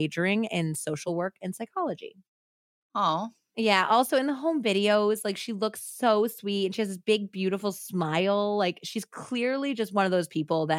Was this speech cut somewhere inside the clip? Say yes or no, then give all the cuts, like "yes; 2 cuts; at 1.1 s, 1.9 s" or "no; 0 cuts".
no; 0 cuts